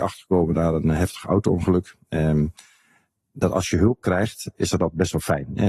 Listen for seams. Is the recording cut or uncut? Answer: uncut